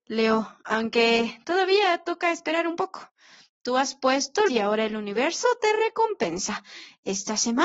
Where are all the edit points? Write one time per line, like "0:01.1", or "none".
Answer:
0:04.5